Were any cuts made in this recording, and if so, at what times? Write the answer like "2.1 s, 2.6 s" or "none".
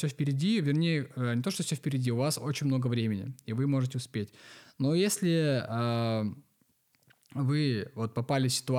none